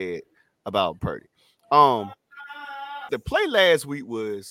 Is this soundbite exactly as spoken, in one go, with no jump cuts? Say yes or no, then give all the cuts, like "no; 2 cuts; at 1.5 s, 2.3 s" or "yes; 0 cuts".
no; 2 cuts; at 1.0 s, 3.1 s